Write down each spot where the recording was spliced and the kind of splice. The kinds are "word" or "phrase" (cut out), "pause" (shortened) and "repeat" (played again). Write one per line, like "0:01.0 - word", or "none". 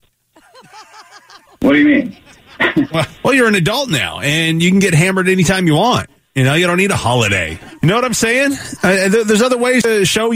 0:03.2 - pause